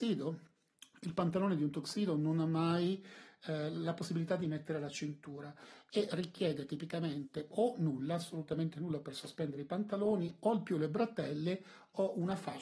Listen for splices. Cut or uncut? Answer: uncut